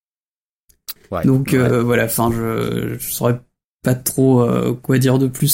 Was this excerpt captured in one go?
yes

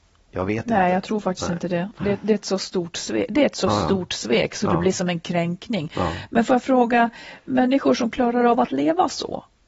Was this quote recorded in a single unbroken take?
yes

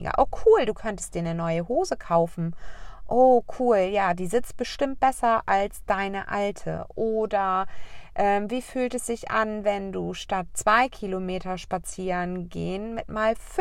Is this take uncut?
yes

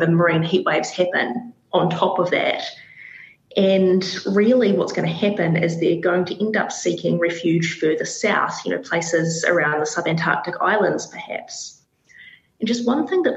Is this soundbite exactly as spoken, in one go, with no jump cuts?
yes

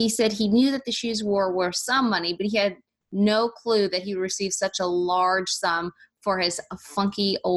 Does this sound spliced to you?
no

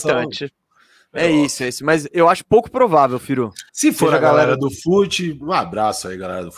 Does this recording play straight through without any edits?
no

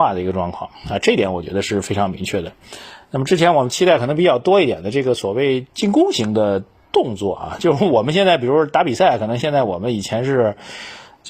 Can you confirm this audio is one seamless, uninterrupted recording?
yes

